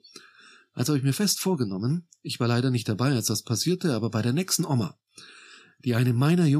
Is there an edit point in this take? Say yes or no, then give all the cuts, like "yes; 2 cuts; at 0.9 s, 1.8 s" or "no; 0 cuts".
no; 0 cuts